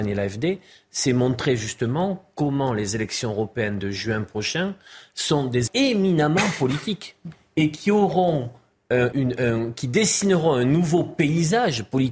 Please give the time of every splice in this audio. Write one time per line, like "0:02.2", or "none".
0:05.7
0:09.1